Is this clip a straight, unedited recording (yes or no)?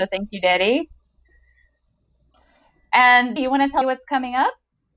no